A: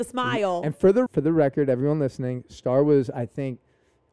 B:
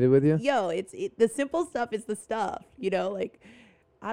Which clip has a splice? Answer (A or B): A